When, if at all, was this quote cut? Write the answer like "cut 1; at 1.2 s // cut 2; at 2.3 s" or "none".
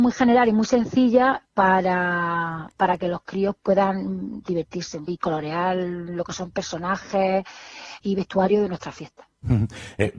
cut 1; at 3.6 s // cut 2; at 5.1 s // cut 3; at 8.0 s